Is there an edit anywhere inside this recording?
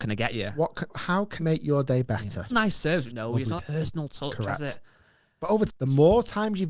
yes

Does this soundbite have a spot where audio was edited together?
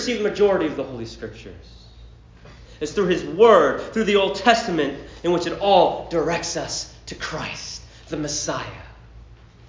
no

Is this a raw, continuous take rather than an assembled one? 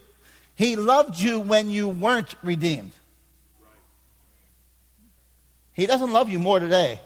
yes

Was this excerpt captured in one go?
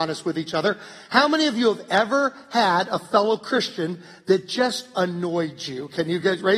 yes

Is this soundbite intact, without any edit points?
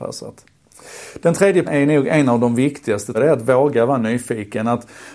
no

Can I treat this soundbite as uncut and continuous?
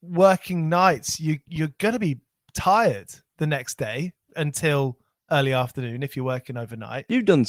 yes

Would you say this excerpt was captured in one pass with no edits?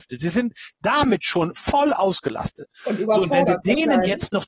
no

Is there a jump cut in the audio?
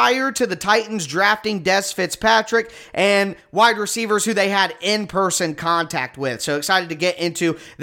no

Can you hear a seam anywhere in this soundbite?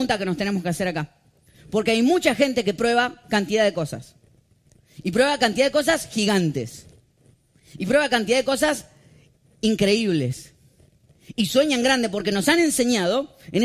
no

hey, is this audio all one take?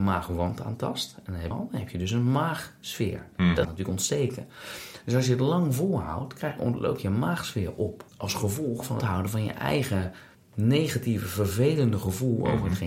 no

